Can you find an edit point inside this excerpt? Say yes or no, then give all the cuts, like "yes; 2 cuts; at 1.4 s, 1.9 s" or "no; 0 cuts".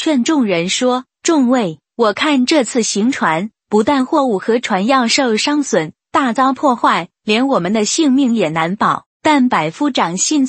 yes; 1 cut; at 9.1 s